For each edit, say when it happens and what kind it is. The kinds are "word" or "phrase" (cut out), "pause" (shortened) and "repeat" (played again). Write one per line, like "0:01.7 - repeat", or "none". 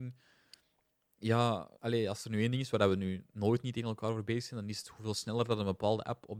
0:01.7 - pause